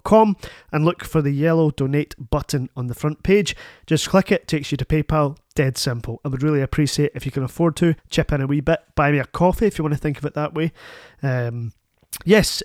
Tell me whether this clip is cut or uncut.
cut